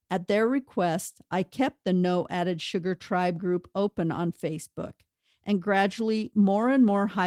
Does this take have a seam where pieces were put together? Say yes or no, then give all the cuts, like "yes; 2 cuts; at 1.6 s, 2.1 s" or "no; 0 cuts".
no; 0 cuts